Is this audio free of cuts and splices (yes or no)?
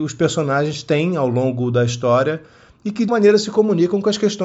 no